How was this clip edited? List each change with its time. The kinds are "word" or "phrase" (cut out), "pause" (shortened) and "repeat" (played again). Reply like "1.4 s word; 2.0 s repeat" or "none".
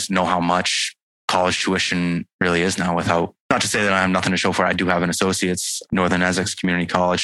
none